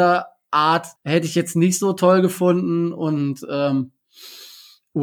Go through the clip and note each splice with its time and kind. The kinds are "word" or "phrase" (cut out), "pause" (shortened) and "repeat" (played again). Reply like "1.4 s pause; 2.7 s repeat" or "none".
1.0 s pause